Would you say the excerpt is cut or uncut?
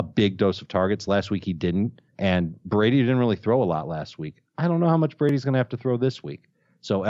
cut